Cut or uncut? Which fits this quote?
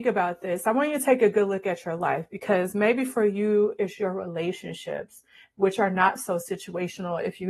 uncut